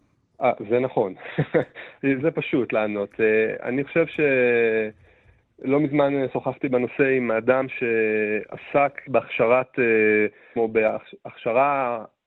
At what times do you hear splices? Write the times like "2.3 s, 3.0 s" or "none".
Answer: 2.2 s, 9.1 s, 10.6 s